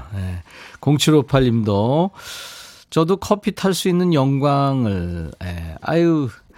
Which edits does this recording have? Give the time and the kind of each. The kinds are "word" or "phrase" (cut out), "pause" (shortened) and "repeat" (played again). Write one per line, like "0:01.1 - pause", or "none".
none